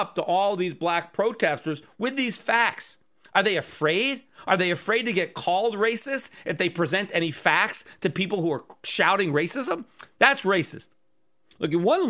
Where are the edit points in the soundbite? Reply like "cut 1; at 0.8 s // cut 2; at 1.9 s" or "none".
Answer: none